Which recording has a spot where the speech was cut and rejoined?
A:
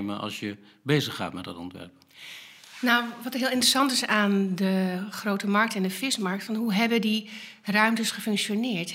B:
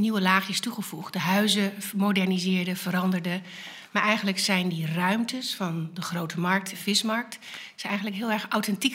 B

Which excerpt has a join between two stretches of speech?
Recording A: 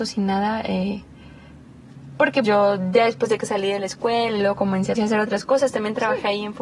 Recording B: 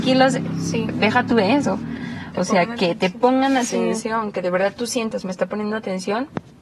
A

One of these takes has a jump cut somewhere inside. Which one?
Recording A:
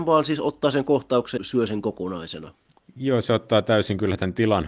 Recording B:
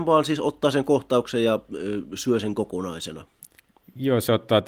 A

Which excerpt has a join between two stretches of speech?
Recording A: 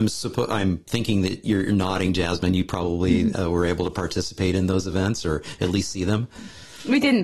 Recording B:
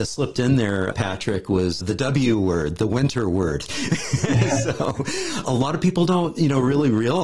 B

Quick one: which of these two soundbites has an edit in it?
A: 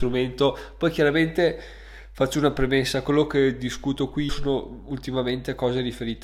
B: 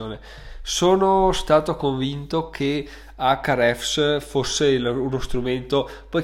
A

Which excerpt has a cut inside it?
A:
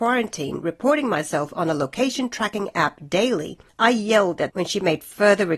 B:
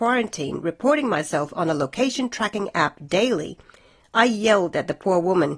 A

